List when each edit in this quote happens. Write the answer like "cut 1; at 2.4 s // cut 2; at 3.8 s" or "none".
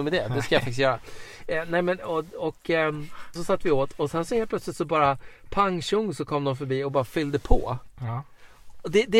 cut 1; at 3.4 s